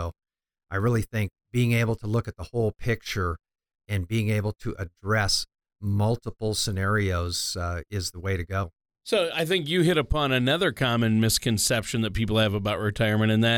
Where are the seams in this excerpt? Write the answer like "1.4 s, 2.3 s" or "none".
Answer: 1.4 s

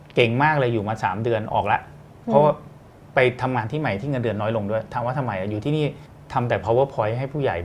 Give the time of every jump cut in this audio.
6.1 s

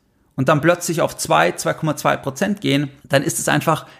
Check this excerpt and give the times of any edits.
3.0 s

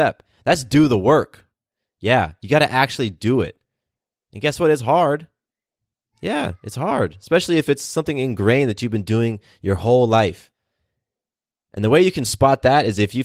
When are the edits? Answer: none

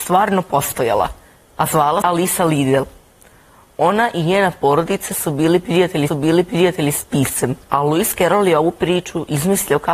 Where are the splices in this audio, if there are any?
2.0 s, 6.1 s, 7.6 s

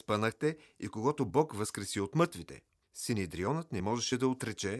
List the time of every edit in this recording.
2.8 s

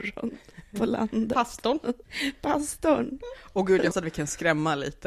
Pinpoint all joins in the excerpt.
2.0 s, 3.9 s

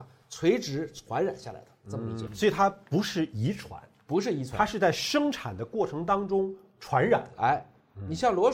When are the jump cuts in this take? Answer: 2.3 s

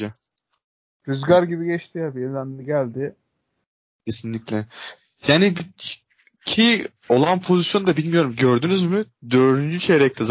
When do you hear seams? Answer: none

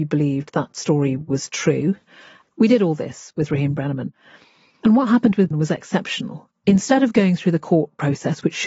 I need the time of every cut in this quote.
5.5 s

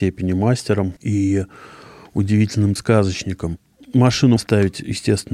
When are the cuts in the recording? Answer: 1.0 s, 2.8 s, 4.4 s

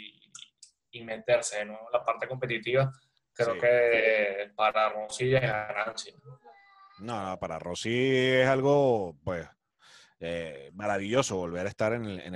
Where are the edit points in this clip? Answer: none

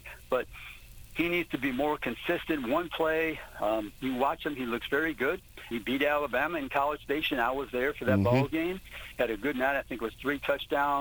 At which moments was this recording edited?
5.7 s

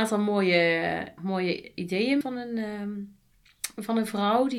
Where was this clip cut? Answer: 1.2 s, 2.2 s

